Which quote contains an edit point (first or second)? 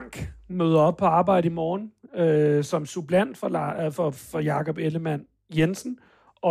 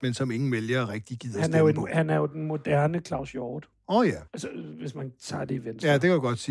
second